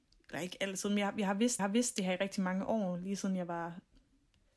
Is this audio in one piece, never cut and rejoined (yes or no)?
no